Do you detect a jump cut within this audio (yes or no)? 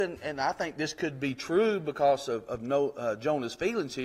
no